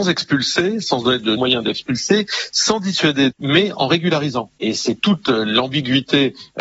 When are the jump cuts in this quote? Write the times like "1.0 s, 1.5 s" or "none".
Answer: 1.4 s, 3.3 s